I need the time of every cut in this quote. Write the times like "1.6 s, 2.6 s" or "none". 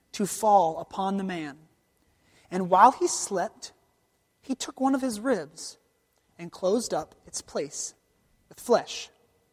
none